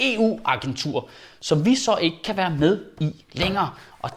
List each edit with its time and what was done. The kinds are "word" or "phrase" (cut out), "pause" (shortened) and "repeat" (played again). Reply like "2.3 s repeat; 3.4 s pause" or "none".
none